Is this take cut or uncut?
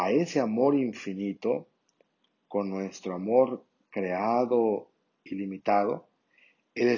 uncut